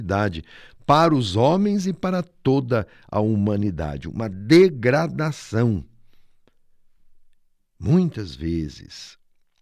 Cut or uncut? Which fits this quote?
uncut